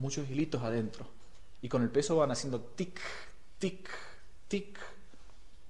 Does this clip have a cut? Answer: no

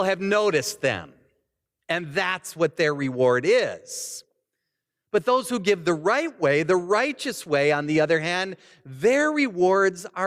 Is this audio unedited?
yes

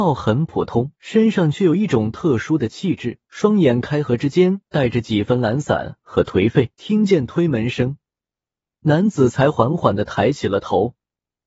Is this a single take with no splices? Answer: no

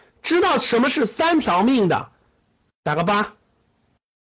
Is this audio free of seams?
yes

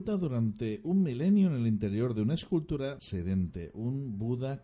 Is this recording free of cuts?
yes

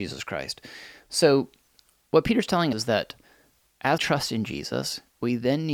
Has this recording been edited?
yes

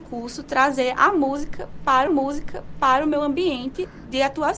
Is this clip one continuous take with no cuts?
no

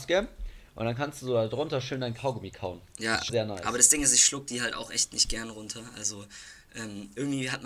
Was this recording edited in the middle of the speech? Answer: yes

